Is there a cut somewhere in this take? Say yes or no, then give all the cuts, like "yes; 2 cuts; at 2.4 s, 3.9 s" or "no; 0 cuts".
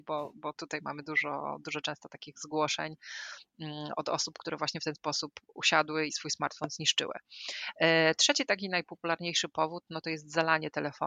yes; 1 cut; at 6.1 s